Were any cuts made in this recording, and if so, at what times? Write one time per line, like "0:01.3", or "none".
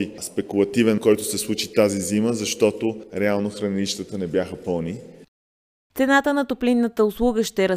0:01.0